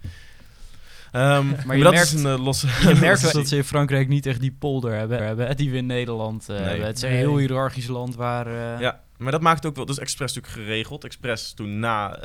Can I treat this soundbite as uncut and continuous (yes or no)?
no